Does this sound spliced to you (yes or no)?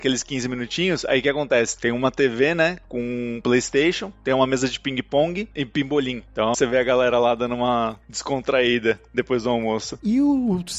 yes